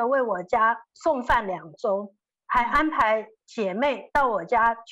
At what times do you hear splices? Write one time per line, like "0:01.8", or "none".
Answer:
none

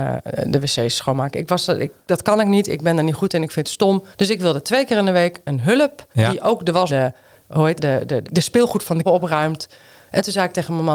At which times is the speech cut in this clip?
0:04.1
0:06.1
0:06.9
0:07.8
0:08.2
0:09.0

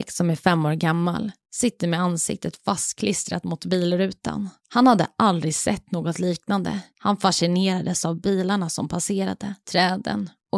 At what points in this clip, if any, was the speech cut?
0:04.6
0:06.9
0:09.6

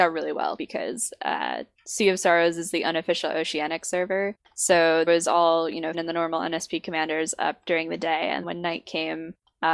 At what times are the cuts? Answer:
0:05.1
0:05.9
0:08.4

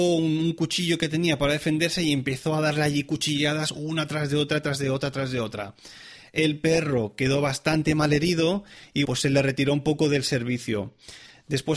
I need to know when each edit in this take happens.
0:09.0

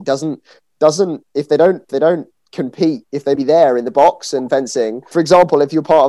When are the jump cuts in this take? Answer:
0:01.9
0:03.4
0:05.1

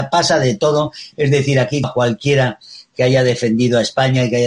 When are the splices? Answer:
0:01.8

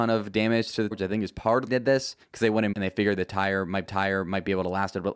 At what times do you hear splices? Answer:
0:00.9
0:01.7
0:02.2
0:02.7
0:03.8

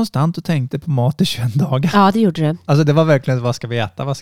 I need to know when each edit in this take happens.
none

